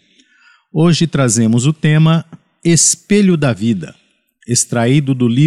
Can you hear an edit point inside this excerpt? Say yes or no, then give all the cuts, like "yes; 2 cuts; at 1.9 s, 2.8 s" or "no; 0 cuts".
no; 0 cuts